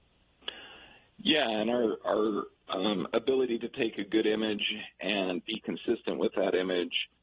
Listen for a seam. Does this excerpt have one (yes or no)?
no